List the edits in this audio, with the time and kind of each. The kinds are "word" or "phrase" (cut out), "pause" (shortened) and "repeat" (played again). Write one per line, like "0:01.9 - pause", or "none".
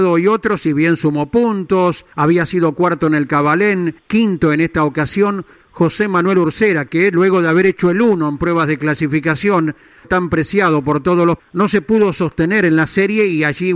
0:02.1 - pause
0:04.0 - pause
0:10.0 - word
0:11.4 - word